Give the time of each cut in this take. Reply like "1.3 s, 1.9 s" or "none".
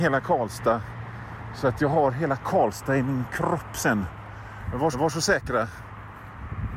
4.9 s